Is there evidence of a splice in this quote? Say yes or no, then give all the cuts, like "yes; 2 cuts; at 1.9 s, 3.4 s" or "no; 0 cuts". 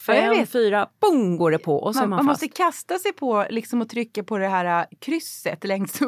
no; 0 cuts